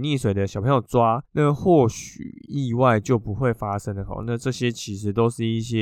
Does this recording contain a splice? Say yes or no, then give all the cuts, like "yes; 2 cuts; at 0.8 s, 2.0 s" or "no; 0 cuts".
yes; 1 cut; at 1.3 s